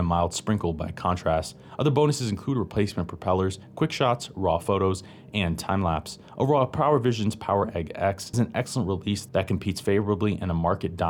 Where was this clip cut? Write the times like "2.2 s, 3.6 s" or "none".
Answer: 8.3 s